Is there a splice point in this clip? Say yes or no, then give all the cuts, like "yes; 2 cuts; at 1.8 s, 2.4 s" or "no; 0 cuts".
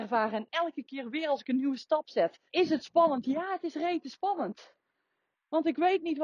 yes; 1 cut; at 2.5 s